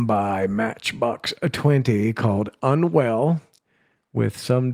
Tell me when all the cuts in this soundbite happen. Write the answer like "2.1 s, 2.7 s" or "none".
none